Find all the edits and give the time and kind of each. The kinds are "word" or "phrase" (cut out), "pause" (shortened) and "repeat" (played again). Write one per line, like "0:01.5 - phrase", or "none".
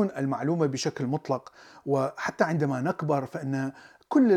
none